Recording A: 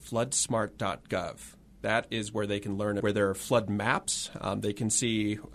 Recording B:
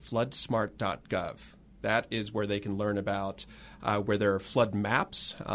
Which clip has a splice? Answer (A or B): A